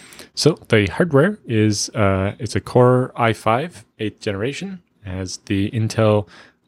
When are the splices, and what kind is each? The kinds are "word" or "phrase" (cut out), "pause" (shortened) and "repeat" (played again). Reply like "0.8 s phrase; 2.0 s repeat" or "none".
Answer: 3.9 s pause

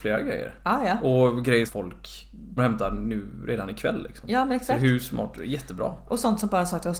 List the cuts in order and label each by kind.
1.7 s phrase; 2.6 s word

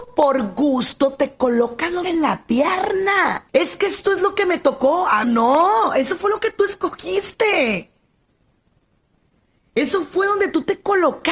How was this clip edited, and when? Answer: 2.0 s word; 3.5 s pause; 5.2 s word

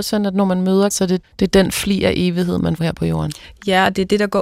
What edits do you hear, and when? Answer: 0.9 s word; 1.2 s word; 2.8 s word

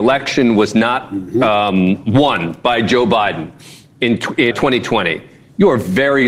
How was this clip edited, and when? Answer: 4.5 s word

